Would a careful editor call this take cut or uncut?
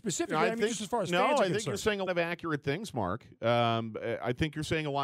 cut